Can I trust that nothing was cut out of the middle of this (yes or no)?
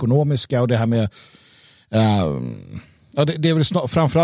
yes